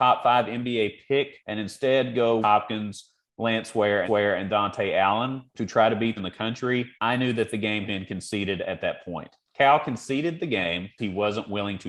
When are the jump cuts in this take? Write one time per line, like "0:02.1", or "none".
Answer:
0:01.4
0:02.4
0:04.0
0:05.5
0:06.2
0:06.9
0:07.9
0:09.4
0:11.0